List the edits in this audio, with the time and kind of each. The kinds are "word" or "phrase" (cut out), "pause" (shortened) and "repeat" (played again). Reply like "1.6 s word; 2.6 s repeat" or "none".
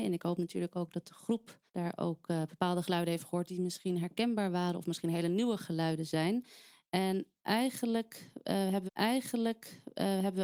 1.7 s pause; 8.9 s repeat